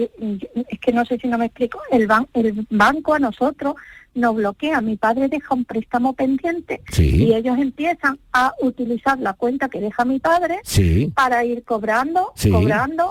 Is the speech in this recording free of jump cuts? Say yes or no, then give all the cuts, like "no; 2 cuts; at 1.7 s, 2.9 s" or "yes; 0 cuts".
yes; 0 cuts